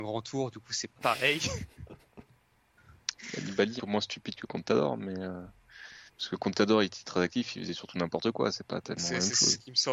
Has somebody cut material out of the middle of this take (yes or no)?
yes